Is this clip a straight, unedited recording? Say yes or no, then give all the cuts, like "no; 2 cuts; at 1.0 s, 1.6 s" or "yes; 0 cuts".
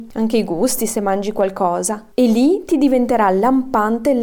yes; 0 cuts